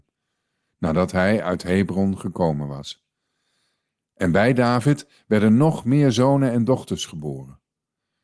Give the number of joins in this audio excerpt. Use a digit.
0